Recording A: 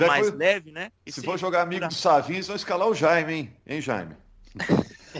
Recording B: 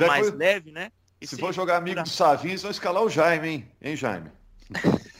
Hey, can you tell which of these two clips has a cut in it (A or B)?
A